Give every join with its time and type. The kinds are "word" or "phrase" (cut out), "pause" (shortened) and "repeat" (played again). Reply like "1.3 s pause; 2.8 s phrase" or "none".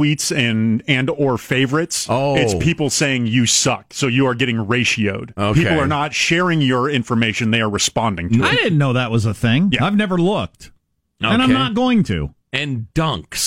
none